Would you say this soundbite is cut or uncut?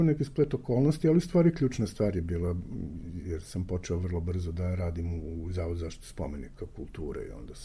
uncut